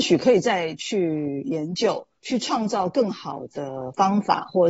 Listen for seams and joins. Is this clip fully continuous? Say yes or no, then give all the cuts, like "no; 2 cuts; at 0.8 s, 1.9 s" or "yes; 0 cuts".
no; 1 cut; at 2.2 s